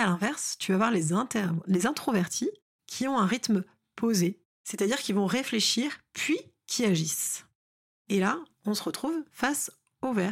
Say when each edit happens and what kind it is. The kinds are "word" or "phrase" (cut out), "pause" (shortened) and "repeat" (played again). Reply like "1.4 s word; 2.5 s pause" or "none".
none